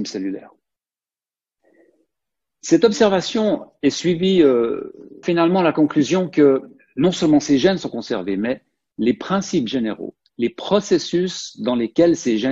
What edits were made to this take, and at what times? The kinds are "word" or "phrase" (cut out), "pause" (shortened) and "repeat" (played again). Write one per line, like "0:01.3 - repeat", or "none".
0:05.2 - phrase